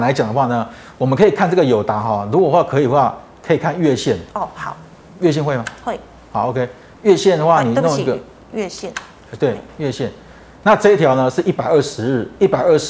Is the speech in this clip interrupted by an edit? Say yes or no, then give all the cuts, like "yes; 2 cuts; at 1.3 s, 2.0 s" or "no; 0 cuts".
yes; 2 cuts; at 4.3 s, 9.2 s